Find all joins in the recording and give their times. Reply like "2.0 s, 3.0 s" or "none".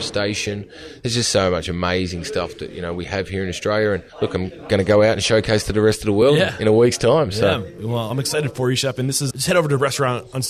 4.1 s, 9.3 s